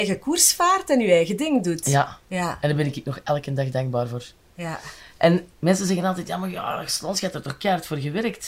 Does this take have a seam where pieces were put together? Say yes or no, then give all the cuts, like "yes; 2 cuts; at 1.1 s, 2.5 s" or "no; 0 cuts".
yes; 1 cut; at 5.5 s